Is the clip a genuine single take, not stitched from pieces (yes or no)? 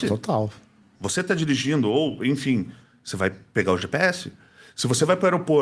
yes